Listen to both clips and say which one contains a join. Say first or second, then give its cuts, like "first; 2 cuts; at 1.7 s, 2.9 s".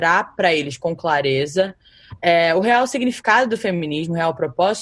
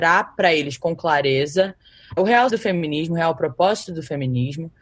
second; 2 cuts; at 2.2 s, 2.5 s